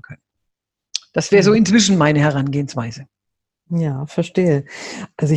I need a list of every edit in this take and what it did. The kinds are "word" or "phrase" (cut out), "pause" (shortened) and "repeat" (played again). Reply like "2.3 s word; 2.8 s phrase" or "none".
none